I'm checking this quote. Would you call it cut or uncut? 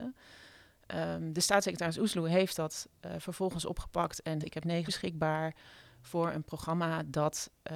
cut